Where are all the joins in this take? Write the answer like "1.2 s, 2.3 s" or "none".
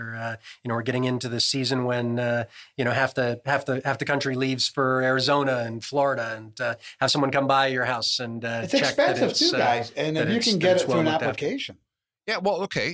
none